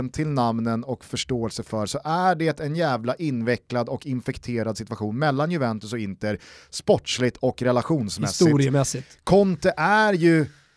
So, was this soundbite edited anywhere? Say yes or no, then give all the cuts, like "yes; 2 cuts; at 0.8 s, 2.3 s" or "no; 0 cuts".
no; 0 cuts